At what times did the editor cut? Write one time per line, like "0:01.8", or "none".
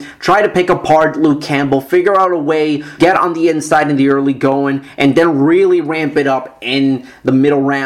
0:03.0